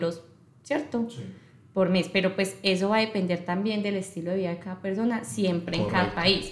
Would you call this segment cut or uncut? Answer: uncut